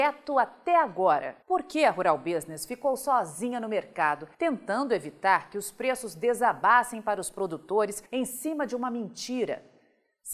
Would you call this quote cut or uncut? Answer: cut